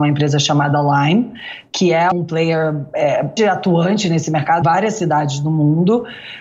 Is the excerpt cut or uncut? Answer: cut